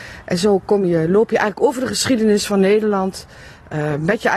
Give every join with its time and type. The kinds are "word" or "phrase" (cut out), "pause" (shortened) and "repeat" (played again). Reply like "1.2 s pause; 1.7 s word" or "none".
none